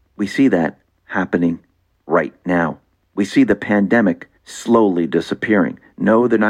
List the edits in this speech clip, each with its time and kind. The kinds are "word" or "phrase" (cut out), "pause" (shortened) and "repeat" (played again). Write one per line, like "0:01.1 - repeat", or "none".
0:04.4 - pause